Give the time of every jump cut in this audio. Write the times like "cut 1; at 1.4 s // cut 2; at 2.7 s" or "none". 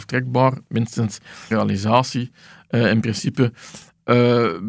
cut 1; at 1.5 s